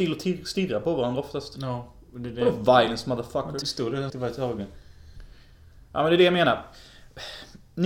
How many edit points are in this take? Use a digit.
2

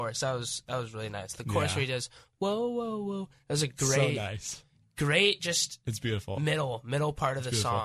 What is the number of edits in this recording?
0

